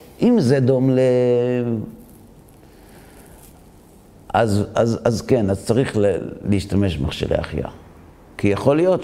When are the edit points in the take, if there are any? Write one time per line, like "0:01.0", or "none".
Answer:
none